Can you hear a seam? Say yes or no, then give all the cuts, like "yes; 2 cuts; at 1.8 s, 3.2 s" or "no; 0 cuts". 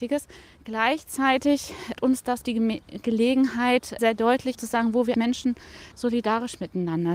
yes; 6 cuts; at 1.9 s, 2.4 s, 4.0 s, 4.5 s, 5.1 s, 5.9 s